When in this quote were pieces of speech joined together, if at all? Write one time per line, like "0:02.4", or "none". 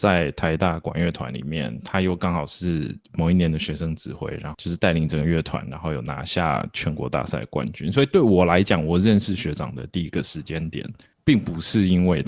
0:11.1